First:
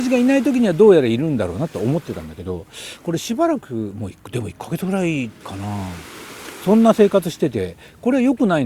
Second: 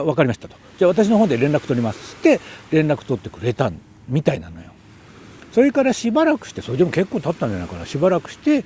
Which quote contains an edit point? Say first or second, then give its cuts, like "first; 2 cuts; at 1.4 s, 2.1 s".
first; 1 cut; at 5.4 s